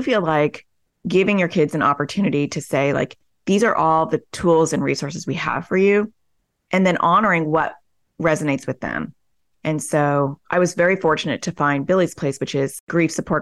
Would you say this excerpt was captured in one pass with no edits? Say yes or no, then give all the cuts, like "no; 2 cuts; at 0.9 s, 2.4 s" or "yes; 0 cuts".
yes; 0 cuts